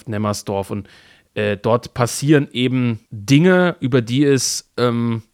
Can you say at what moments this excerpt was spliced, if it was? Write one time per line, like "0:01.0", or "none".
0:03.1